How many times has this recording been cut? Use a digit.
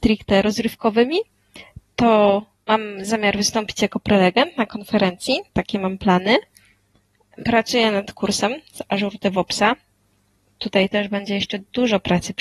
1